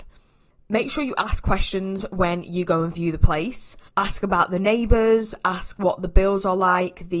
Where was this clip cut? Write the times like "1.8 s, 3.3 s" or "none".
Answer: 3.9 s